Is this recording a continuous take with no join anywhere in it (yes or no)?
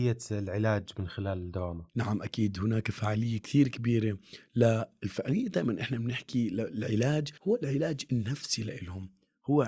no